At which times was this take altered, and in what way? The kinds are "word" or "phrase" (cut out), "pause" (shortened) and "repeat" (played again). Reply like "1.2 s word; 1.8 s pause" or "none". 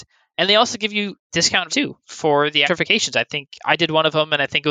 1.7 s word; 2.6 s word